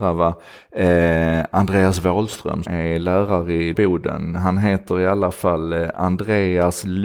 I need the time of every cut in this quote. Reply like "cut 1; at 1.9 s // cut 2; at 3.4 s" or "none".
cut 1; at 2.6 s // cut 2; at 3.7 s